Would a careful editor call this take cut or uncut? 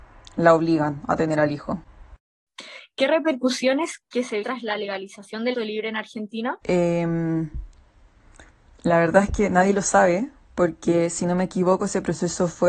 cut